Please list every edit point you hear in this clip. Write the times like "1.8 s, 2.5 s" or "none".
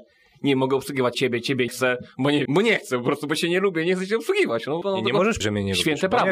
1.1 s, 1.7 s, 2.5 s, 4.8 s, 5.4 s

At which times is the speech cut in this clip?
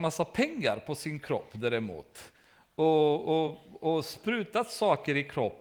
none

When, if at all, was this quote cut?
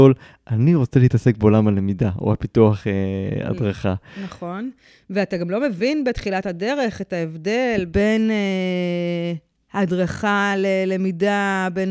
none

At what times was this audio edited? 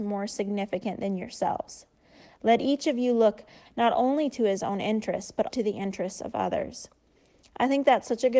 5.5 s

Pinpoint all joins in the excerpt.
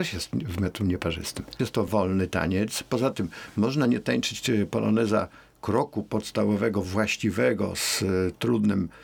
none

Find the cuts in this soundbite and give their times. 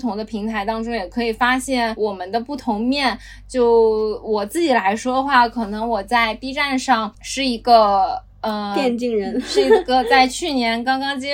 none

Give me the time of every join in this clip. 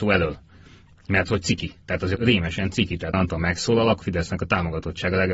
1.8 s, 2.2 s, 3.1 s, 4.0 s

